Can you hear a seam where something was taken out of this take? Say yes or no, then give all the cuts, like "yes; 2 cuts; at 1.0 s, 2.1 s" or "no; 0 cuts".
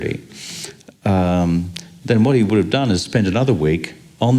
no; 0 cuts